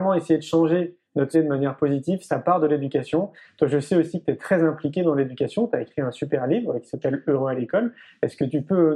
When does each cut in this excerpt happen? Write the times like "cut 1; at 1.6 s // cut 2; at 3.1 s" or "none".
cut 1; at 1.3 s

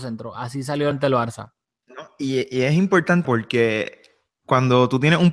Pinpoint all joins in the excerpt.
cut 1; at 0.9 s // cut 2; at 3.2 s

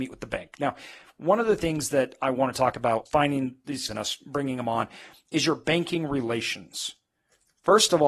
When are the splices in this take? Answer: cut 1; at 3.1 s // cut 2; at 3.9 s

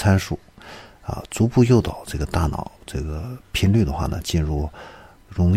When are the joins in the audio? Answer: cut 1; at 2.8 s

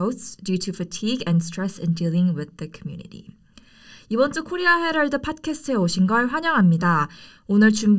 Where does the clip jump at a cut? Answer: none

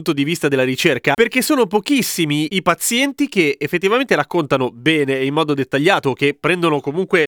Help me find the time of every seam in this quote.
none

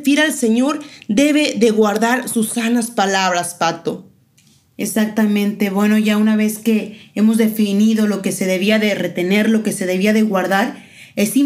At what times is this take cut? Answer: none

